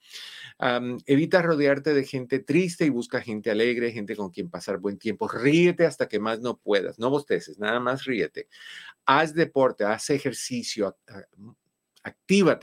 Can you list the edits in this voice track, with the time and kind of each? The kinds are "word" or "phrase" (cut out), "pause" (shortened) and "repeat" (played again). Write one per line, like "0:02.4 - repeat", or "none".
0:11.0 - word